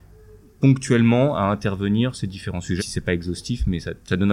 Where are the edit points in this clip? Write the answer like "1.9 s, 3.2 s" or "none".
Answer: 2.1 s, 2.8 s